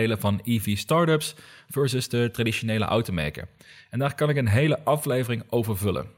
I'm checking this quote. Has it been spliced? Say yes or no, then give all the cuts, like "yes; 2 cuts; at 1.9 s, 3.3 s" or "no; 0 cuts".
no; 0 cuts